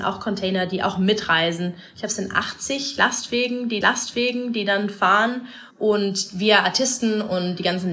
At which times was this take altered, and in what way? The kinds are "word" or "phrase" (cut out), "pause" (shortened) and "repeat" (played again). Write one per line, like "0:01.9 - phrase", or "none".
0:03.8 - repeat
0:05.7 - pause